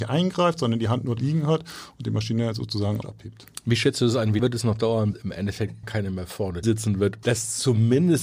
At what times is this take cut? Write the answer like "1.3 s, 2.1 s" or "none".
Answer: 1.2 s, 3.0 s, 4.4 s, 5.1 s, 5.8 s, 6.6 s, 7.2 s